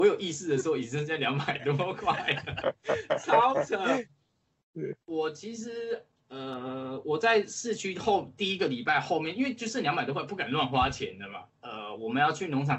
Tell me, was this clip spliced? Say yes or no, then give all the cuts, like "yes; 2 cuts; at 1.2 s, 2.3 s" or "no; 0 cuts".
yes; 2 cuts; at 5.0 s, 11.5 s